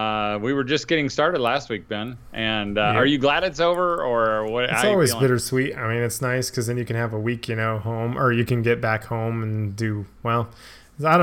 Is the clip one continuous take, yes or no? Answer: yes